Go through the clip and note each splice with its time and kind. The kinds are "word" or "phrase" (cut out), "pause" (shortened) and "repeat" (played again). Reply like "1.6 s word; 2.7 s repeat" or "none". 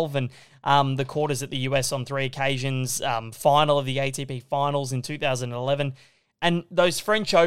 none

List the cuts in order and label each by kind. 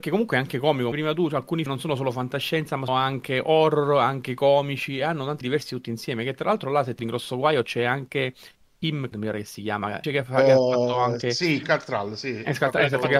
0.9 s word; 1.7 s word; 2.9 s word; 5.4 s word; 7.0 s word; 9.1 s word; 10.0 s word; 11.6 s word

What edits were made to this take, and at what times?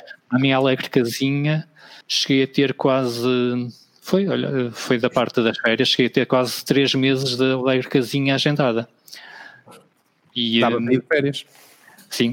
2.0 s pause

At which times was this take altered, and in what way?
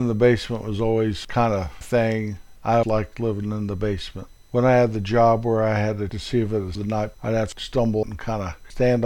1.8 s word; 2.8 s word; 6.1 s word; 6.8 s word; 7.1 s word; 8.0 s word

